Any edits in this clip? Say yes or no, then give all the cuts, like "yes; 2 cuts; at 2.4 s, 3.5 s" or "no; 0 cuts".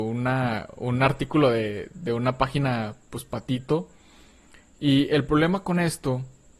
no; 0 cuts